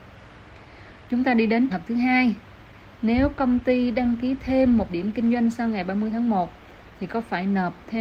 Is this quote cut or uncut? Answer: cut